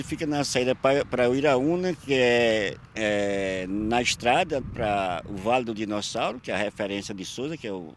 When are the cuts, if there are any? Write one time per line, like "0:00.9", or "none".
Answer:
0:02.8
0:04.6